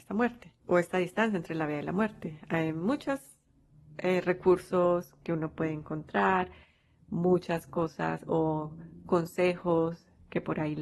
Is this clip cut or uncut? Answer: uncut